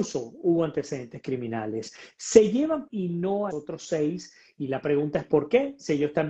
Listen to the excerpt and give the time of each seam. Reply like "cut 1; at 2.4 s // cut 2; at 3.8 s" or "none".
cut 1; at 2.9 s // cut 2; at 3.5 s